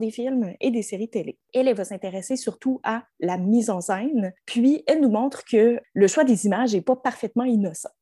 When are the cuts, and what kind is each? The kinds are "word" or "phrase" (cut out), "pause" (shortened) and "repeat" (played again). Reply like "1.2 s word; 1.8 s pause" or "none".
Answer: 1.4 s pause